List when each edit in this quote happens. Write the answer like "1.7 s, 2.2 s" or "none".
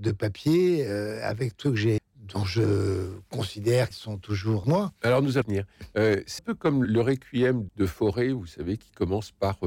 1.6 s, 2.0 s, 3.9 s, 4.6 s, 5.4 s, 6.4 s, 6.8 s, 7.7 s